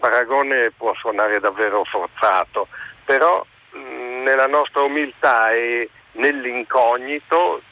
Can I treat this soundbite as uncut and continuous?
yes; 0 cuts

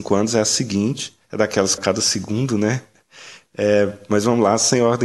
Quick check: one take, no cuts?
no; 2 cuts; at 1.2 s, 1.8 s

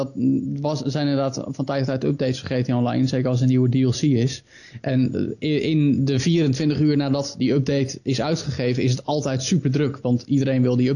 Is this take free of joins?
yes; 0 cuts

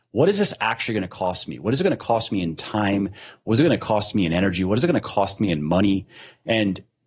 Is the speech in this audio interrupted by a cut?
no; 0 cuts

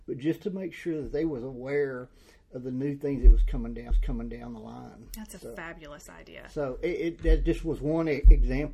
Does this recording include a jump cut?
yes; 1 cut; at 3.9 s

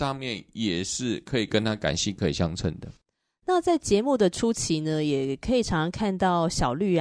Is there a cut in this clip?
no; 0 cuts

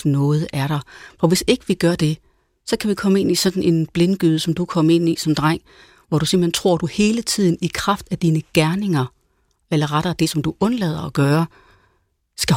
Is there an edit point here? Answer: no; 0 cuts

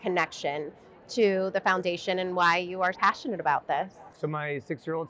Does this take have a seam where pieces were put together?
yes; 1 cut; at 2.9 s

